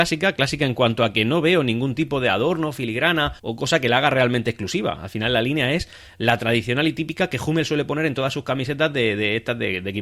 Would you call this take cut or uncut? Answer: cut